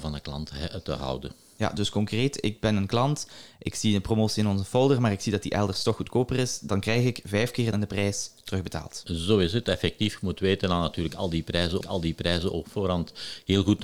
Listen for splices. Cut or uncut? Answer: cut